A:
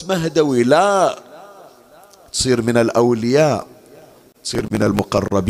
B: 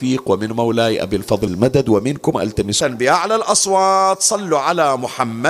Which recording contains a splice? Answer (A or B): B